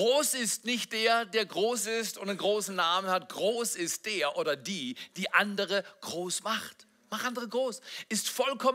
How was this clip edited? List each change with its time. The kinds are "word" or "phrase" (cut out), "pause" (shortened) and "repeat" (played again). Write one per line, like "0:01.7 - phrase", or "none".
none